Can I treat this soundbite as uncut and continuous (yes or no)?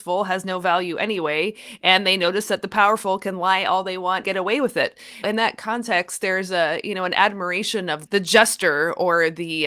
no